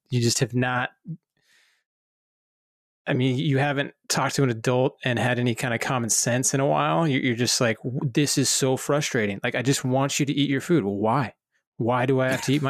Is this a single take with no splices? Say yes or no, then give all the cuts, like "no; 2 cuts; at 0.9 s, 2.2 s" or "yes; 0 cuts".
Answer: yes; 0 cuts